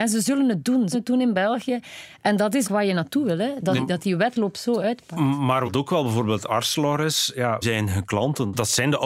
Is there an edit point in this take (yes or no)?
yes